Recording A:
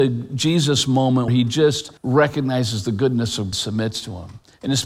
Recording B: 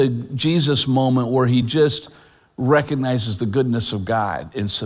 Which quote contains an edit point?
A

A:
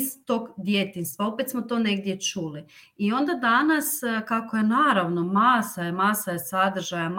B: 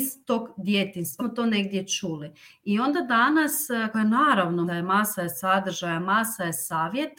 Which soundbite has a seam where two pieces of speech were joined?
B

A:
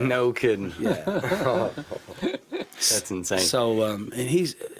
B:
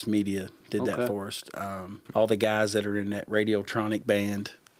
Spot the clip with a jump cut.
B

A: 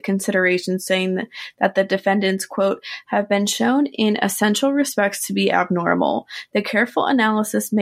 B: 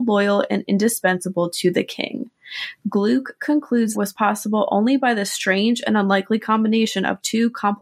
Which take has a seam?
B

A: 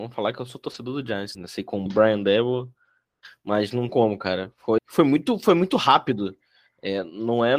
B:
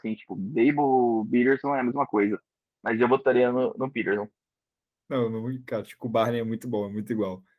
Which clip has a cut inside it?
A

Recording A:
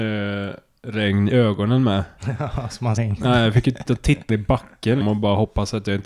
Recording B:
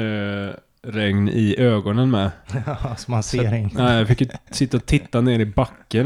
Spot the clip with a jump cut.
A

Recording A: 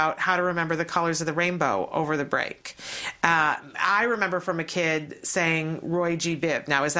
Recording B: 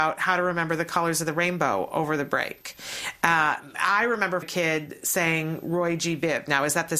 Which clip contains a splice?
B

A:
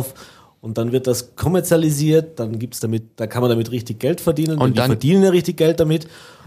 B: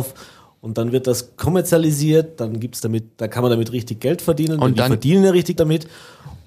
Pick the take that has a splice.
B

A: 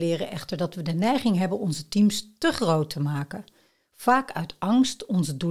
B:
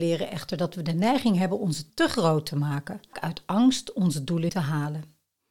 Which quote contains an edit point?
B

